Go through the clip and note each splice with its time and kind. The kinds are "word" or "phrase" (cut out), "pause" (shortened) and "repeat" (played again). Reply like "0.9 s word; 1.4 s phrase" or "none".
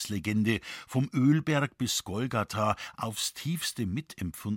none